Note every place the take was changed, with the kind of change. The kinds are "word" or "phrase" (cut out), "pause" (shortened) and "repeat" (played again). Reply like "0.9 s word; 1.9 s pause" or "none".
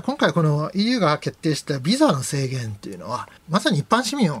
3.4 s pause